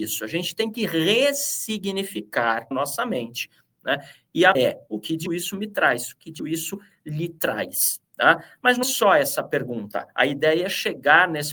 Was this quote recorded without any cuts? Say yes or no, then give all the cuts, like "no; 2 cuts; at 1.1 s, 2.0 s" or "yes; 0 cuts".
no; 5 cuts; at 2.7 s, 4.5 s, 5.3 s, 6.4 s, 8.8 s